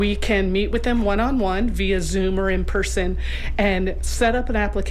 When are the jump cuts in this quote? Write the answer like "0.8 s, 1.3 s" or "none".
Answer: none